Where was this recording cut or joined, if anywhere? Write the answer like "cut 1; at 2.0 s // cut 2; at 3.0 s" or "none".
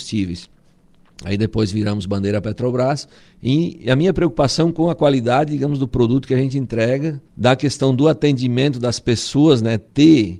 cut 1; at 3.2 s // cut 2; at 7.3 s